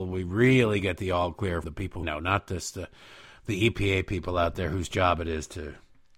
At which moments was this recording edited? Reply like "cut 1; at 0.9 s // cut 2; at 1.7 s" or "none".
cut 1; at 1.6 s // cut 2; at 2.0 s

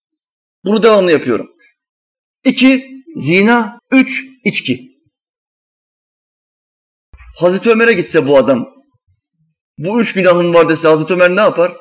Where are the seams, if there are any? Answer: cut 1; at 3.8 s

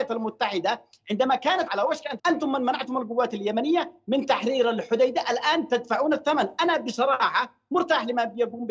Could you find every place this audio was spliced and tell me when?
cut 1; at 1.7 s // cut 2; at 2.2 s

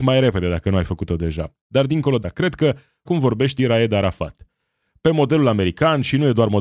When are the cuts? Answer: cut 1; at 1.6 s // cut 2; at 2.2 s // cut 3; at 3.1 s // cut 4; at 3.6 s

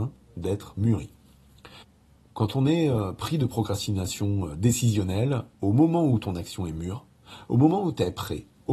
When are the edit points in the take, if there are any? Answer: cut 1; at 1.8 s // cut 2; at 5.5 s

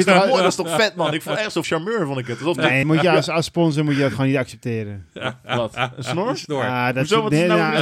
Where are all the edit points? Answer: cut 1; at 1.6 s // cut 2; at 2.8 s

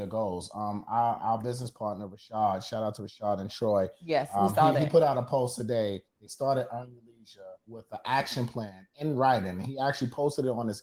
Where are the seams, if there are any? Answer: cut 1; at 6.1 s // cut 2; at 7.6 s

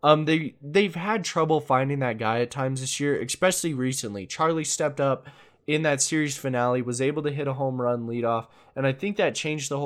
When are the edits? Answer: none

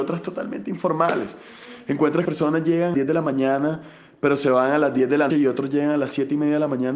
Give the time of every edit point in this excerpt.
cut 1; at 2.3 s // cut 2; at 2.9 s // cut 3; at 5.3 s

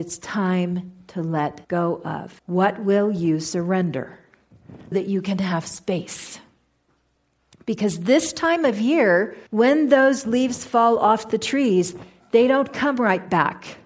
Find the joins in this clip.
cut 1; at 1.6 s // cut 2; at 2.4 s // cut 3; at 4.9 s // cut 4; at 9.5 s

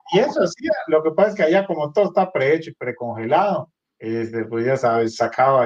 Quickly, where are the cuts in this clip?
cut 1; at 3.8 s

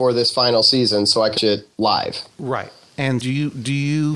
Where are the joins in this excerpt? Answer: cut 1; at 1.4 s // cut 2; at 1.7 s // cut 3; at 3.2 s

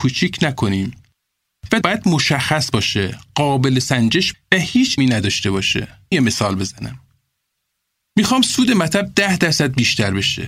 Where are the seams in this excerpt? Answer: cut 1; at 1.8 s // cut 2; at 4.3 s // cut 3; at 5.0 s // cut 4; at 6.1 s

